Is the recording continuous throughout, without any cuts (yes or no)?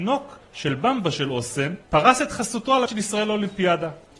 no